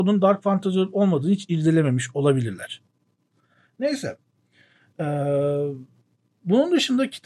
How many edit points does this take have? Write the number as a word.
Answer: zero